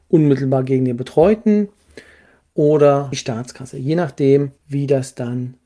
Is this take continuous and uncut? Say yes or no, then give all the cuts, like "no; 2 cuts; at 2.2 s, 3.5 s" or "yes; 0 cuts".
no; 2 cuts; at 3.1 s, 4.6 s